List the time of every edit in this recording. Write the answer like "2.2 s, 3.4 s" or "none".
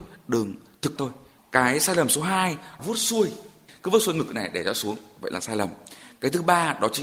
1.0 s, 2.8 s